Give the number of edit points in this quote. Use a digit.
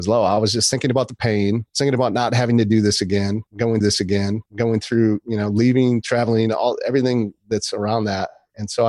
2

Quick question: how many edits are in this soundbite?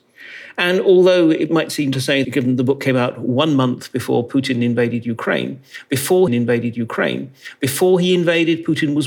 3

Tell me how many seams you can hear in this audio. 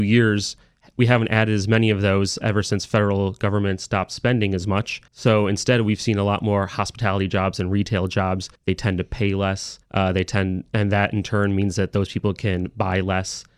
3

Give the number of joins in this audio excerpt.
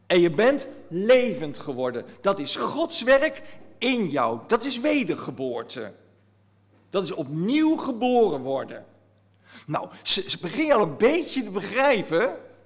0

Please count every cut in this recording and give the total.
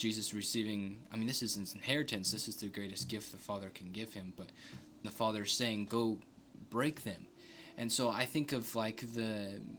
1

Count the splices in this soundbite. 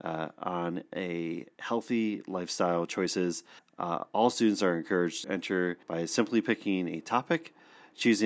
3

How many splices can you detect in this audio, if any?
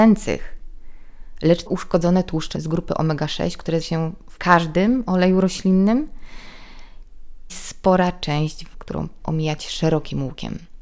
7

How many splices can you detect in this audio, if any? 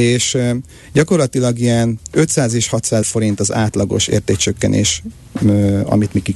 1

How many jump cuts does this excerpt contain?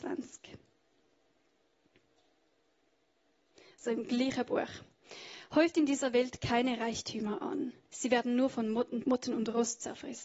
1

